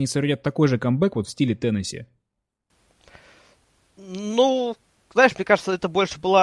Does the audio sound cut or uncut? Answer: uncut